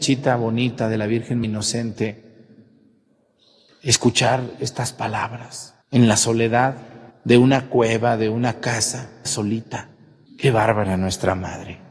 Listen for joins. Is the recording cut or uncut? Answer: cut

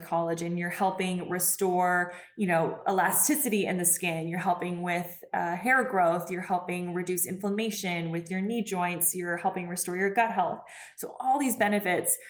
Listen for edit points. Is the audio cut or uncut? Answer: uncut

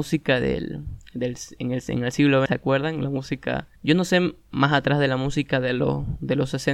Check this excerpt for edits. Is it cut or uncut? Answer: cut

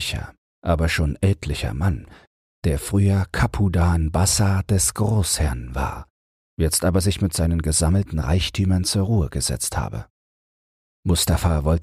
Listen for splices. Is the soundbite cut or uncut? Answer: uncut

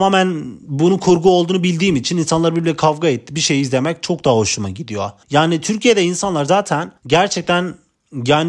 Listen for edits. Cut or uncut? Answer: cut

